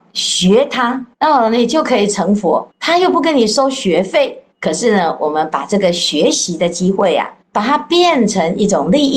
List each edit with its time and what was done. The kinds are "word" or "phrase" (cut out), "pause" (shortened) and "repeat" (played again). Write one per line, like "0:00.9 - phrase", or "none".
0:01.1 - pause
0:02.7 - pause
0:04.5 - pause
0:07.4 - pause